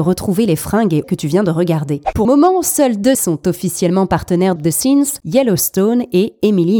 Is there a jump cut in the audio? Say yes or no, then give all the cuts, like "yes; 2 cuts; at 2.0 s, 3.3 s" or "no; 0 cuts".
yes; 4 cuts; at 1.0 s, 2.2 s, 3.1 s, 4.6 s